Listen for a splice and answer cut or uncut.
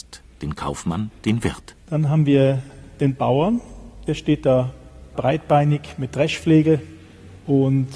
cut